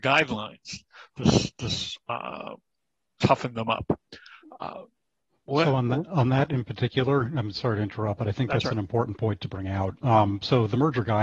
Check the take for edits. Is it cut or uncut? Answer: uncut